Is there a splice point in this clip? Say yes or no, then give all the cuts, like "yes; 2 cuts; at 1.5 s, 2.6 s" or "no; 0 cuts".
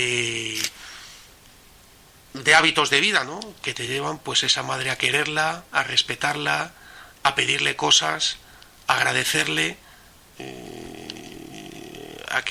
no; 0 cuts